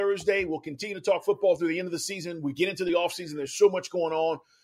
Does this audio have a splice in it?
no; 0 cuts

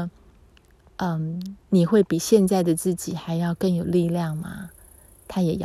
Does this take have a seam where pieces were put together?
yes; 1 cut; at 1.6 s

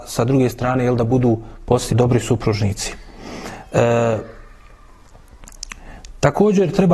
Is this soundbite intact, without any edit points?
no; 1 cut; at 1.9 s

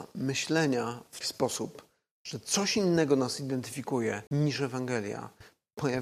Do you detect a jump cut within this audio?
yes; 2 cuts; at 1.2 s, 4.3 s

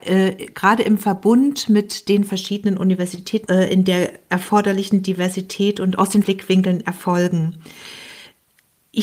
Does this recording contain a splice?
yes; 2 cuts; at 3.5 s, 6.2 s

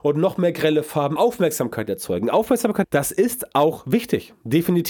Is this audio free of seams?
no; 2 cuts; at 1.2 s, 2.8 s

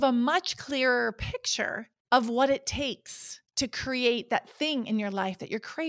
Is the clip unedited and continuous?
no; 2 cuts; at 2.0 s, 3.5 s

